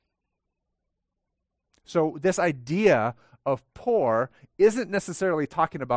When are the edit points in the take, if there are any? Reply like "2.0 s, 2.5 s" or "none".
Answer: none